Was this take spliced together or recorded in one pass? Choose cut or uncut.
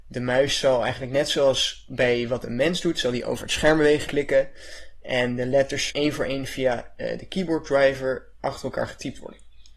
cut